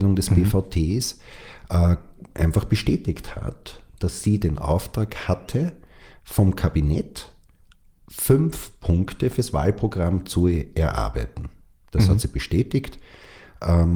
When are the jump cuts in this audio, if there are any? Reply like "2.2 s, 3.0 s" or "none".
none